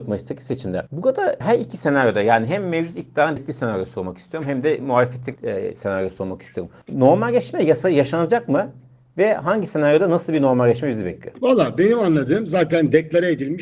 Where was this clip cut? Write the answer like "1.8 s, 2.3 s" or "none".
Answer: 1.4 s, 3.4 s, 5.4 s, 6.8 s